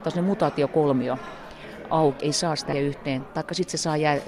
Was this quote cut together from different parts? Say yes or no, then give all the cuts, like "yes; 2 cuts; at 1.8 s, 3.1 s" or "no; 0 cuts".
yes; 3 cuts; at 1.9 s, 2.2 s, 2.7 s